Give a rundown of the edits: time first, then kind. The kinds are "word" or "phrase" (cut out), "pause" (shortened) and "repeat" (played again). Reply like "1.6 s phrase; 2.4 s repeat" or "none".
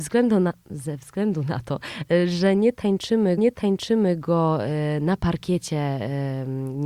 3.4 s repeat